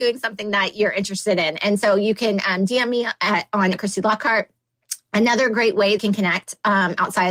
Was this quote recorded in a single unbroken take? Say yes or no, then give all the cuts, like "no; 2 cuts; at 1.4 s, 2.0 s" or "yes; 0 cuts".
no; 2 cuts; at 3.7 s, 6.0 s